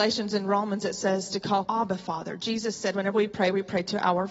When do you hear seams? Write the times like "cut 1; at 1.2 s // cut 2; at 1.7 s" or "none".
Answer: cut 1; at 1.6 s

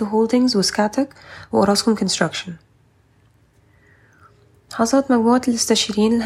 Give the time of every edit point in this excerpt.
none

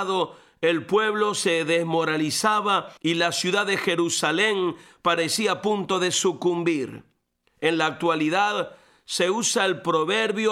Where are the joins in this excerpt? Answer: cut 1; at 3.0 s

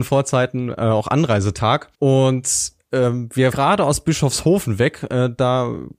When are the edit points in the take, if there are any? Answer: cut 1; at 1.9 s // cut 2; at 3.5 s

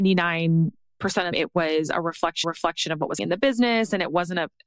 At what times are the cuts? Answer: cut 1; at 1.3 s // cut 2; at 2.4 s // cut 3; at 3.2 s

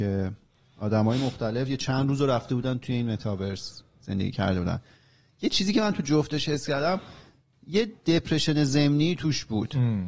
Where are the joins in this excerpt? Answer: none

